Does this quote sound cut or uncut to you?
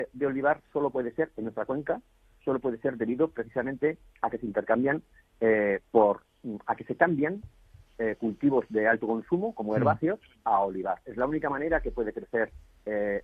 uncut